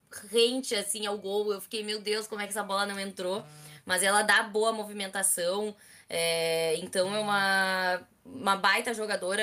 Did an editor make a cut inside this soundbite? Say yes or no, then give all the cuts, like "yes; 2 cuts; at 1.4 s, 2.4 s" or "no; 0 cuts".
no; 0 cuts